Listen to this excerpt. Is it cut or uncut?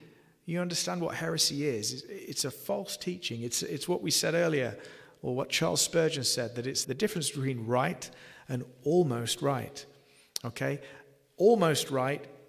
cut